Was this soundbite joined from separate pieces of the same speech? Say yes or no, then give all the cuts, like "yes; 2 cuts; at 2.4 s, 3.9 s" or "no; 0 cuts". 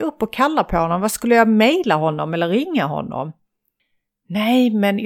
no; 0 cuts